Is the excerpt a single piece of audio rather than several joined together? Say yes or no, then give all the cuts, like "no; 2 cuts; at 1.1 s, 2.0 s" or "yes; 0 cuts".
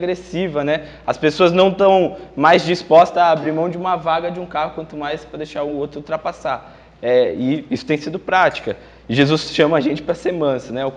yes; 0 cuts